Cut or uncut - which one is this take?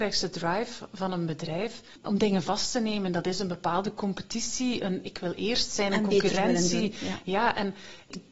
uncut